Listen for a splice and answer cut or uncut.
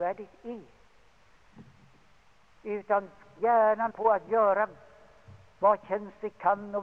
cut